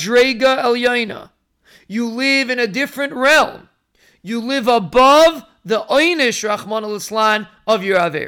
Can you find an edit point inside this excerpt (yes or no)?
no